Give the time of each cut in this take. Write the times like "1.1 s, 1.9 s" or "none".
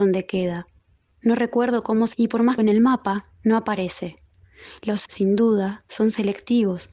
2.1 s, 2.6 s, 5.1 s